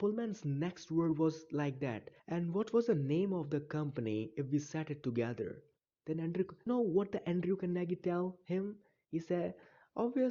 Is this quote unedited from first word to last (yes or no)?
no